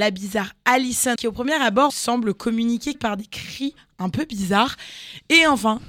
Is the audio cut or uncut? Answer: cut